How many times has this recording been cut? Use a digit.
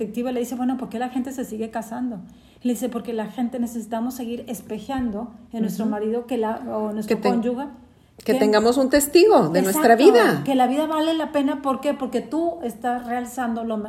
0